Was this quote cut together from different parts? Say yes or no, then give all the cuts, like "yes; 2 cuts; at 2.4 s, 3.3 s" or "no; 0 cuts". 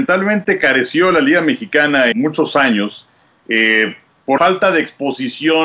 yes; 2 cuts; at 2.1 s, 4.4 s